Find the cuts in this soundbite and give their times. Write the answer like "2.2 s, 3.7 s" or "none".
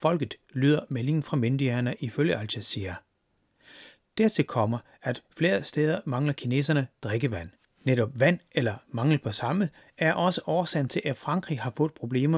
none